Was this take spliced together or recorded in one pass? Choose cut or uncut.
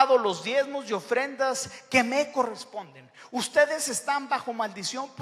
uncut